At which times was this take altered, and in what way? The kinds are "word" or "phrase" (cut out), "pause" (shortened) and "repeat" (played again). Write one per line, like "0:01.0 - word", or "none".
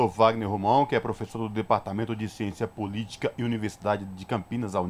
none